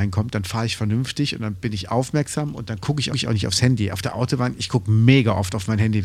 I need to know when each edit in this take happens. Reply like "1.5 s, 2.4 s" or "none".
3.1 s

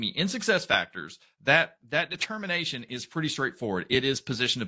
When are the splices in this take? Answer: none

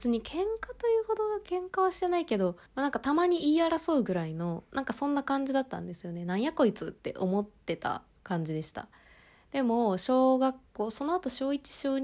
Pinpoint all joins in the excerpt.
2.7 s, 8.1 s, 10.7 s

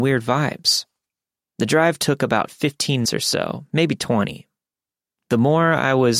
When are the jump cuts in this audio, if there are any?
3.0 s

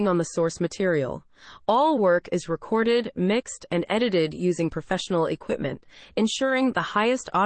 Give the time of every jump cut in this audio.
none

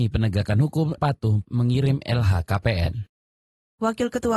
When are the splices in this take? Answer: 1.0 s, 1.4 s

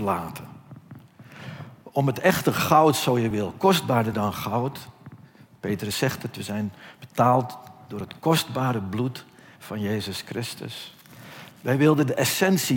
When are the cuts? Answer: none

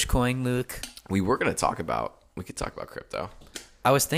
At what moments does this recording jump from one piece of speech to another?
none

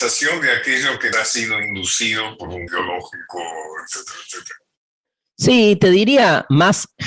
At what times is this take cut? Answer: 1.1 s, 2.7 s

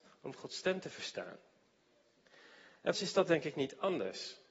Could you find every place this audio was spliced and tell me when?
2.9 s

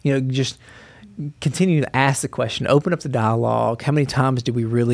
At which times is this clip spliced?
none

